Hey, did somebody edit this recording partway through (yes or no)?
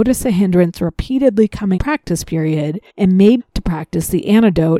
yes